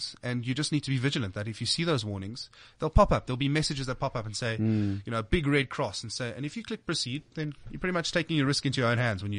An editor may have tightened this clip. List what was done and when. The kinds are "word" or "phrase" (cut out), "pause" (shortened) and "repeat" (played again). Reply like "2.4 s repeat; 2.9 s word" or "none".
none